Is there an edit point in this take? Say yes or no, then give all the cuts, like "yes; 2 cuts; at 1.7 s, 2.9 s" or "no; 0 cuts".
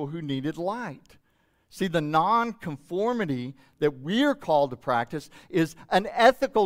no; 0 cuts